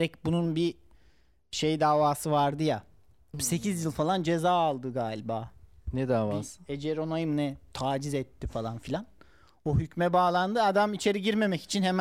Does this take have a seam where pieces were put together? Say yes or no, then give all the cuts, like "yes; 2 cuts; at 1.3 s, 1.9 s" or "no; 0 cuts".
no; 0 cuts